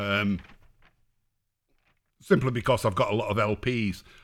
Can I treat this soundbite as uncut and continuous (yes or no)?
yes